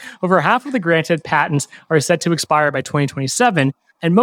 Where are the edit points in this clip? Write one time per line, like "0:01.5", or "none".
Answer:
none

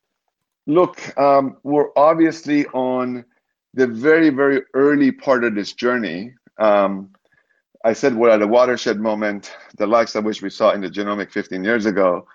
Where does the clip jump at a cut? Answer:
none

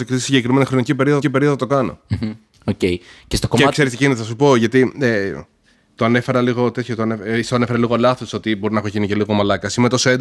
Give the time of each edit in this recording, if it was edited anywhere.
0:01.2
0:02.5

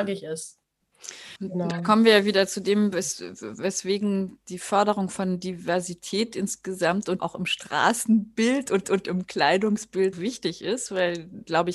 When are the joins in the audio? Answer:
0:01.4
0:07.2
0:08.8
0:10.1

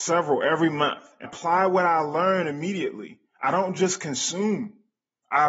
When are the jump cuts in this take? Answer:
0:01.2

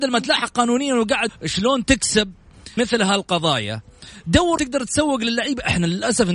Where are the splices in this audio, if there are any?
0:01.3
0:02.8
0:04.6

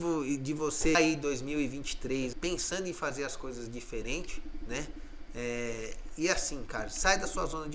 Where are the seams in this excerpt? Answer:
0:00.9
0:02.3

